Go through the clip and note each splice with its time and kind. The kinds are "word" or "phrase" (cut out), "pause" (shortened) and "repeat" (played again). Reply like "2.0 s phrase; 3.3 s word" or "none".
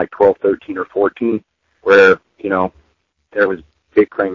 none